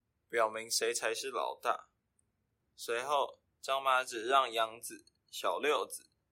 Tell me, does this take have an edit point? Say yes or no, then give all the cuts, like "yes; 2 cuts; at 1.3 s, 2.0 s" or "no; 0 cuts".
no; 0 cuts